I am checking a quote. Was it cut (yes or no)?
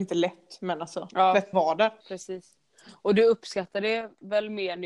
yes